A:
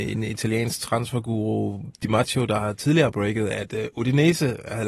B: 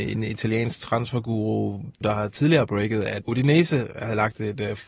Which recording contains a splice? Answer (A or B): B